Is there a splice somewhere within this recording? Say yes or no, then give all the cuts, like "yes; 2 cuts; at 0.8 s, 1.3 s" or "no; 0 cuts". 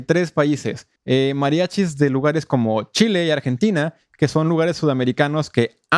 yes; 1 cut; at 1.0 s